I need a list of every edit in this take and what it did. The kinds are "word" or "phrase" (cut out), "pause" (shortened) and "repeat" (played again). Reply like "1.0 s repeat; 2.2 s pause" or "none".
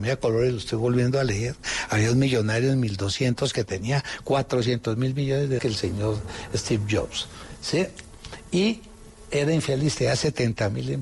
5.6 s phrase